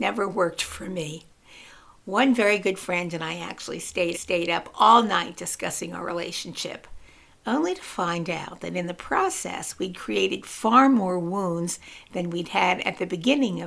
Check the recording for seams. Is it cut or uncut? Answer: cut